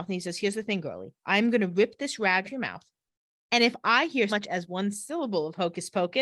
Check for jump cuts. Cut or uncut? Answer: cut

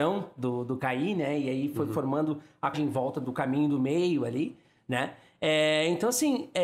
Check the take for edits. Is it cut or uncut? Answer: cut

